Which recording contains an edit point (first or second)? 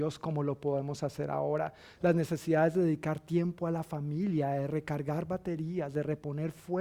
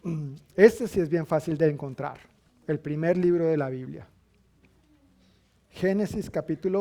second